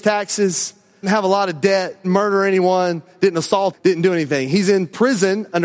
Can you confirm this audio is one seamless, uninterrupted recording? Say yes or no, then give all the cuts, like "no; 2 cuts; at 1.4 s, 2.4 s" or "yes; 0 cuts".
no; 3 cuts; at 1.0 s, 2.0 s, 3.7 s